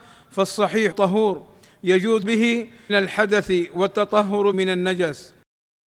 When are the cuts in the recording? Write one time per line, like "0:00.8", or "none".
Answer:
0:00.9
0:02.2
0:02.9
0:04.5